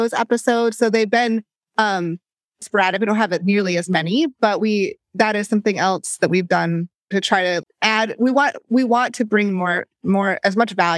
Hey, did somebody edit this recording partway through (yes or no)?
yes